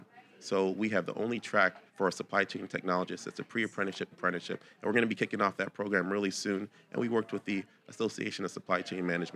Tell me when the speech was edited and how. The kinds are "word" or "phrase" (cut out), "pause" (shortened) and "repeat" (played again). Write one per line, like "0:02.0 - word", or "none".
0:01.9 - pause
0:04.1 - word